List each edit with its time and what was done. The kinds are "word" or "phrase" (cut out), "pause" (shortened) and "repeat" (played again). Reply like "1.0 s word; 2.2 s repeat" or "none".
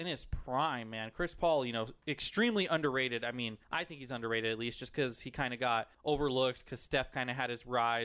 3.6 s pause; 5.9 s pause

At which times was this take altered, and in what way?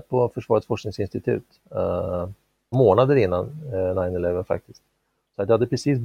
2.7 s word

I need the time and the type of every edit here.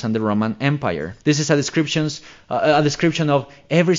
1.2 s pause

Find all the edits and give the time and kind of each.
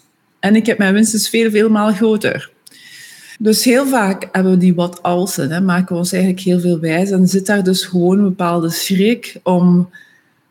3.4 s pause

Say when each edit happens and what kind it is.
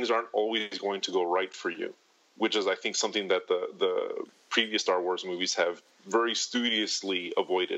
none

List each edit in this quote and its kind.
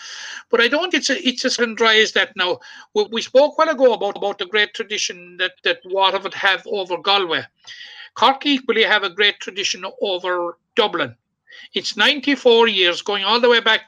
0.9 s word; 1.6 s word; 3.1 s word; 4.2 s repeat; 5.5 s word; 10.6 s pause

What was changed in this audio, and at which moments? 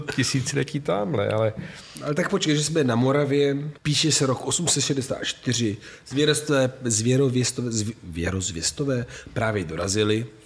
3.8 s pause

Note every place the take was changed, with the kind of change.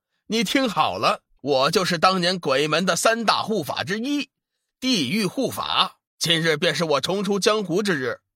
1.4 s pause; 6.1 s pause

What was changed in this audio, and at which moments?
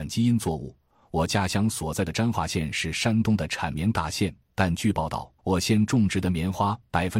5.4 s pause

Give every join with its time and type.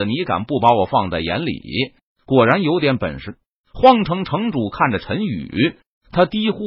none

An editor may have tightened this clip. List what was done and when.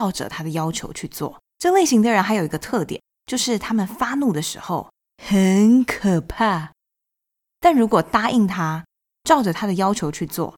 1.5 s pause; 3.1 s pause; 5.0 s pause

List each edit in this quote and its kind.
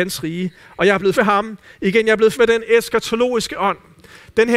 1.1 s word; 2.3 s word

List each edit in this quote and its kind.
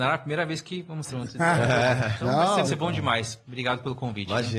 1.1 s word; 2.2 s word; 2.6 s phrase

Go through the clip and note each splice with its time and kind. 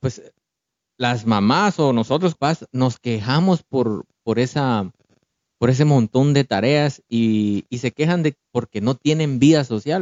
2.3 s word; 8.4 s word

